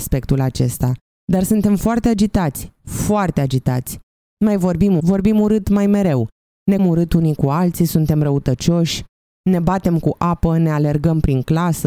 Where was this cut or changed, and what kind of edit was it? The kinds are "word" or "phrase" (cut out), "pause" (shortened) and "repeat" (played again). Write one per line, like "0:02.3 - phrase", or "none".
0:05.0 - word
0:06.8 - word